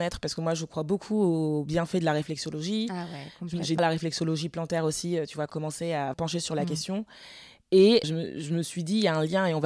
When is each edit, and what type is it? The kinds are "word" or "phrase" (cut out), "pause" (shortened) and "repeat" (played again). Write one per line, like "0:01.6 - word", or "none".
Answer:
0:03.8 - word
0:05.5 - word
0:06.1 - word
0:08.0 - word